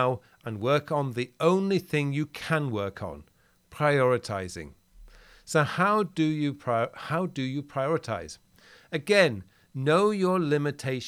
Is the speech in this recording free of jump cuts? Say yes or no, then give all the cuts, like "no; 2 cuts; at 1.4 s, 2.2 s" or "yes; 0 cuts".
yes; 0 cuts